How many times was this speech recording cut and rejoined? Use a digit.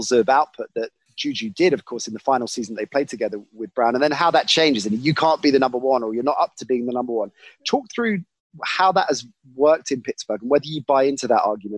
0